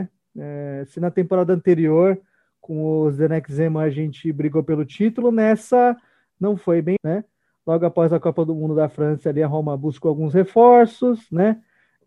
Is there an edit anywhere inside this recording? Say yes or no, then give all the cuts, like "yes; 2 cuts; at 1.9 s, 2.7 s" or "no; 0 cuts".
yes; 1 cut; at 7.0 s